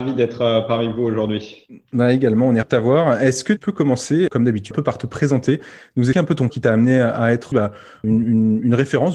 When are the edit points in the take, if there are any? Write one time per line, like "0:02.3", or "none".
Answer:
0:02.6
0:03.6
0:04.3
0:04.7
0:06.1
0:06.5
0:07.5
0:08.0